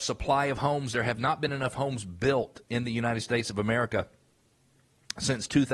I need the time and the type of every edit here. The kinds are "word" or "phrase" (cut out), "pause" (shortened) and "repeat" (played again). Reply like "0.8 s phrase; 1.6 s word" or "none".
none